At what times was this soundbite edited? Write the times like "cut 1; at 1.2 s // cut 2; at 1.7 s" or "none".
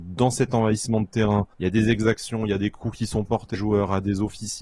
cut 1; at 1.5 s // cut 2; at 3.5 s